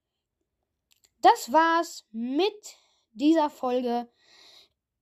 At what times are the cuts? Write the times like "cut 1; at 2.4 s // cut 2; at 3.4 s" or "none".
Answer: none